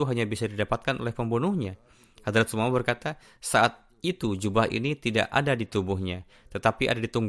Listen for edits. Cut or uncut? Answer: uncut